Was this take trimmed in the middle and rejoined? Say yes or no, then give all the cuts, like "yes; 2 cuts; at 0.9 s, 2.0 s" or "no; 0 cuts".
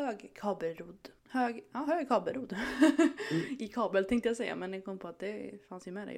yes; 1 cut; at 1.2 s